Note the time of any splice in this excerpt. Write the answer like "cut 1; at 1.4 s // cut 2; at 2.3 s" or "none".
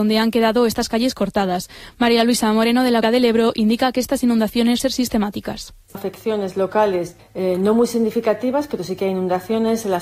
cut 1; at 3.0 s // cut 2; at 4.8 s // cut 3; at 5.9 s // cut 4; at 7.2 s